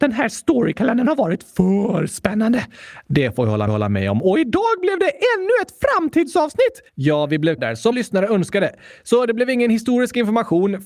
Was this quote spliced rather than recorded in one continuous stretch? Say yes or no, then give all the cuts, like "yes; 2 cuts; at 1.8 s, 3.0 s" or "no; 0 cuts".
yes; 4 cuts; at 3.7 s, 6.9 s, 7.6 s, 7.9 s